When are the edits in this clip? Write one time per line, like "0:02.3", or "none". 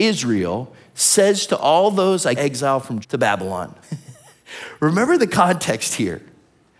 0:02.4
0:03.0
0:03.8